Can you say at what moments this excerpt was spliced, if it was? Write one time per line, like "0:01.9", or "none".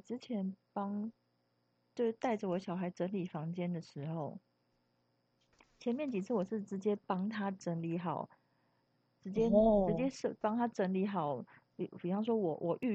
none